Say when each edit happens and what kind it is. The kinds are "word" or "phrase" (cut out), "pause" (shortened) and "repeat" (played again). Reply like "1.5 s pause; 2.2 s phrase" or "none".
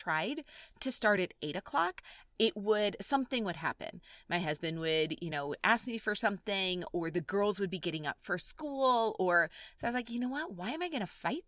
none